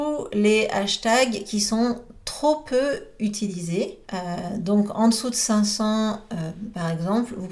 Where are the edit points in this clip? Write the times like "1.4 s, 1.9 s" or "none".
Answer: 4.0 s